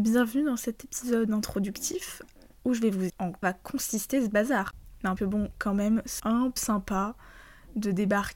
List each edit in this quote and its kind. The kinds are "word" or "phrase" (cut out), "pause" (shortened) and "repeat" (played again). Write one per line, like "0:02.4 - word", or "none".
0:03.1 - word
0:03.4 - word
0:05.2 - word
0:06.2 - word
0:06.6 - word